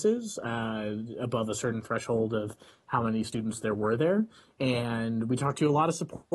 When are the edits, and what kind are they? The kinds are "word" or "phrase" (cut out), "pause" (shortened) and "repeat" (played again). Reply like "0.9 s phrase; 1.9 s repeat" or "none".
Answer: none

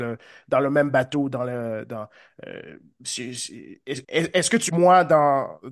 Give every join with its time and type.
4.0 s pause; 4.7 s phrase

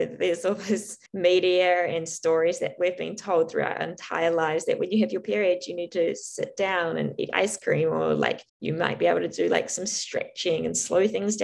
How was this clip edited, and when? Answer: 1.1 s pause; 8.5 s pause

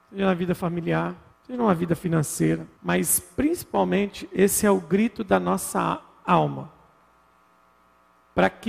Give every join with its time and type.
1.3 s pause; 2.7 s pause

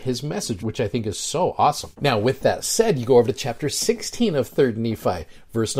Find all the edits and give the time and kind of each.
none

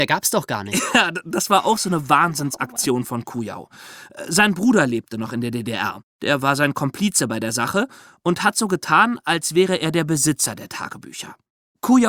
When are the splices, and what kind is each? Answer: none

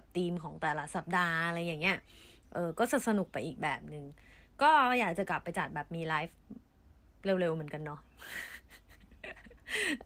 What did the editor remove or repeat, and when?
none

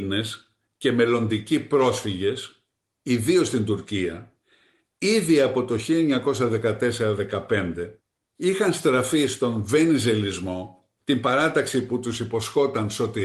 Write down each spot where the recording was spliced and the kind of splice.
none

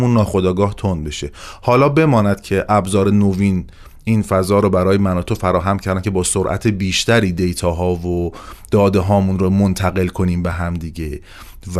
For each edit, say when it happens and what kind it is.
none

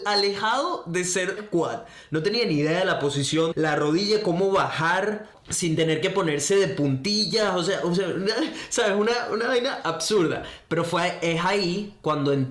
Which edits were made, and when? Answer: 1.4 s word; 3.5 s word; 5.3 s pause

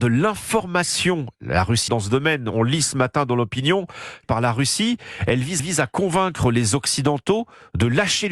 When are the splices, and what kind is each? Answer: 1.9 s word; 4.2 s phrase; 5.6 s repeat

